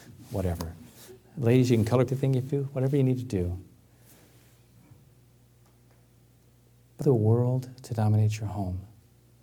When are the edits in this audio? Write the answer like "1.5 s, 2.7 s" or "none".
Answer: 2.1 s, 2.5 s, 7.0 s